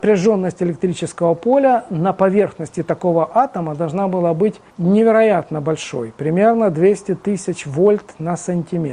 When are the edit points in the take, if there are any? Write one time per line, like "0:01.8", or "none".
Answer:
0:04.7